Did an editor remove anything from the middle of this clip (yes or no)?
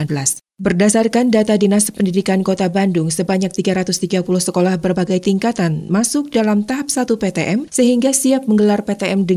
no